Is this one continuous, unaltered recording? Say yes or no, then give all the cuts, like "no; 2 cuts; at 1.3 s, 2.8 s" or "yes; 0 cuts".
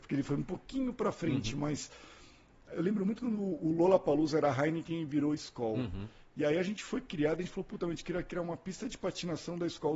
yes; 0 cuts